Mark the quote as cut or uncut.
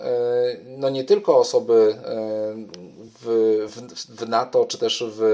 uncut